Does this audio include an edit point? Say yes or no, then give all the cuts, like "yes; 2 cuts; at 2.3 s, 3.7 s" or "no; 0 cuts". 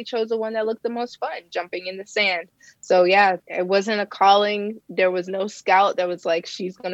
yes; 1 cut; at 3.4 s